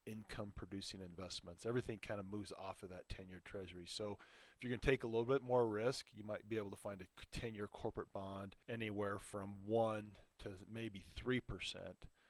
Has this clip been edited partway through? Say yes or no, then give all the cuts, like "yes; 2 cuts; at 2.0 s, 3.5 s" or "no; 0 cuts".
yes; 1 cut; at 8.6 s